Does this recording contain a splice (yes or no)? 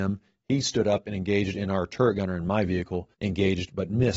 yes